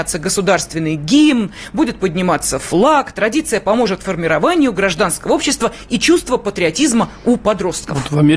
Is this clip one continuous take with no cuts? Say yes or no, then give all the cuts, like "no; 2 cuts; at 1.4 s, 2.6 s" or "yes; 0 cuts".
yes; 0 cuts